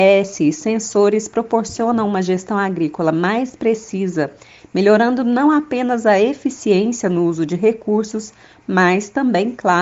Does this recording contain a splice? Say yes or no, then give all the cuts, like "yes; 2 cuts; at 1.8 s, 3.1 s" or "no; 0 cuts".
no; 0 cuts